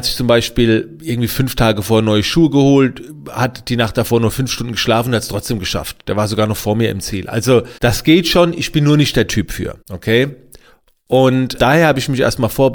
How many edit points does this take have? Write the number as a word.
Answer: three